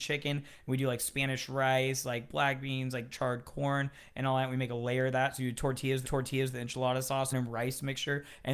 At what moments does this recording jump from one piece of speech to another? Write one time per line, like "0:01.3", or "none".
0:06.0
0:07.3